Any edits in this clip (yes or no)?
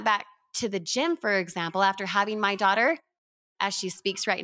no